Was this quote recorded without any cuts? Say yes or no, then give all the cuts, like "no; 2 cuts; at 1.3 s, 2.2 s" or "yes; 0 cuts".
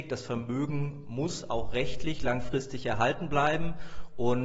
yes; 0 cuts